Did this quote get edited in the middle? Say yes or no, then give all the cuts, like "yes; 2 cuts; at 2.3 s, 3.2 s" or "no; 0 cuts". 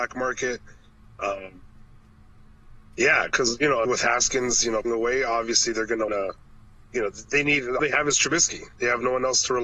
yes; 4 cuts; at 3.8 s, 4.8 s, 6.1 s, 7.8 s